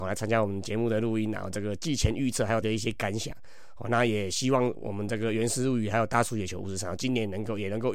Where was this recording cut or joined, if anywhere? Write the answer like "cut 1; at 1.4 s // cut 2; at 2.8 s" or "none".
cut 1; at 2.6 s

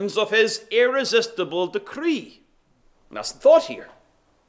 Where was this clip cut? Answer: cut 1; at 2.8 s

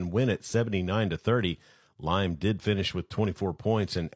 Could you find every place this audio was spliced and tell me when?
none

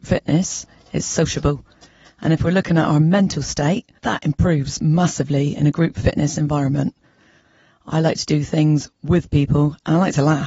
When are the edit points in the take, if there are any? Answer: none

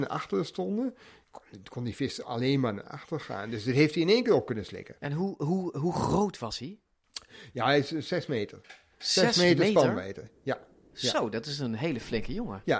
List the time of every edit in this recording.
none

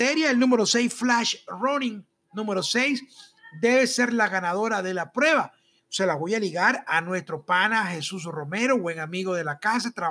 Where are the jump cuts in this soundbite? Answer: none

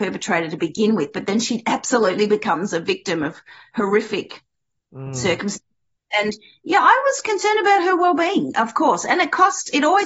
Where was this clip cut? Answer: none

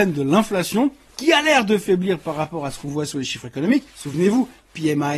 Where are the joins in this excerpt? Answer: cut 1; at 3.9 s

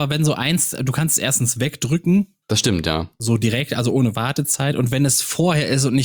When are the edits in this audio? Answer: cut 1; at 2.4 s

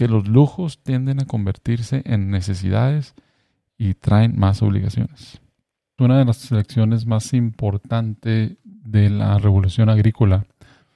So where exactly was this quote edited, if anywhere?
none

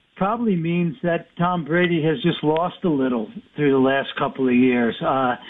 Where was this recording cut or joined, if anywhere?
none

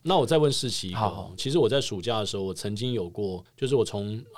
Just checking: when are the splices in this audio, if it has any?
cut 1; at 1.4 s

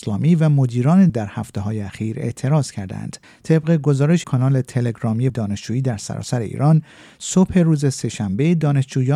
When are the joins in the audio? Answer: cut 1; at 1.1 s // cut 2; at 3.2 s // cut 3; at 4.2 s // cut 4; at 5.3 s

